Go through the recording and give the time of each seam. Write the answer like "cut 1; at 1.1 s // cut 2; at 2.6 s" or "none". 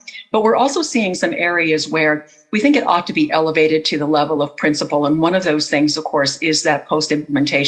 none

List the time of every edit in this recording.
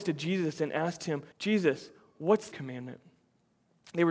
cut 1; at 1.3 s // cut 2; at 2.5 s

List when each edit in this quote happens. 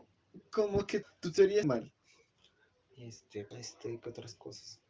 cut 1; at 1.0 s // cut 2; at 1.6 s // cut 3; at 3.5 s

